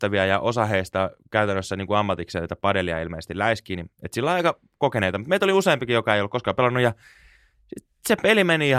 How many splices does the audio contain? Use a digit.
1